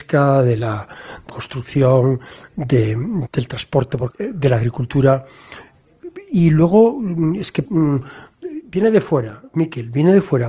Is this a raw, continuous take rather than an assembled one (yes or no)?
no